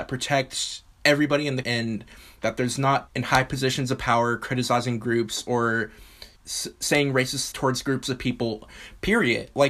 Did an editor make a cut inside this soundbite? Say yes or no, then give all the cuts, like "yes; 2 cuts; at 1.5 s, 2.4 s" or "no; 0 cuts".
yes; 5 cuts; at 0.9 s, 1.6 s, 3.1 s, 6.4 s, 7.5 s